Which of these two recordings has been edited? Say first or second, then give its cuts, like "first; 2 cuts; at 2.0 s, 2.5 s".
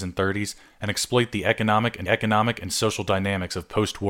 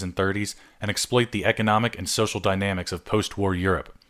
first; 1 cut; at 2.1 s